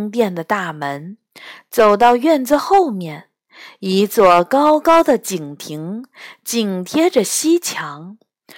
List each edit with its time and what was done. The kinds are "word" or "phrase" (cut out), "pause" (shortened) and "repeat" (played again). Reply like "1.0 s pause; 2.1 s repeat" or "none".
none